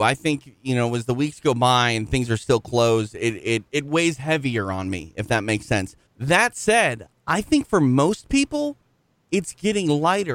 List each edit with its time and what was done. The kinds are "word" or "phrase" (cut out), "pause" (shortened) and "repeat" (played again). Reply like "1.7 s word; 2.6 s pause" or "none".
3.7 s pause; 6.1 s pause